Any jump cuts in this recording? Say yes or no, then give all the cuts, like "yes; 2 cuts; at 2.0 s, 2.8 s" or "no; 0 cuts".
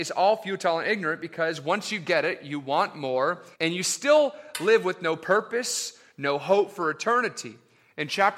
yes; 1 cut; at 3.5 s